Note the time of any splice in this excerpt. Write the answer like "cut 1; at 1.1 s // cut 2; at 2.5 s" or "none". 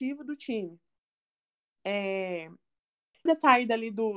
cut 1; at 3.3 s